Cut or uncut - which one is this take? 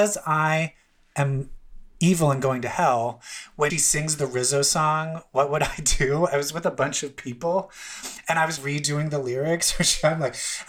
cut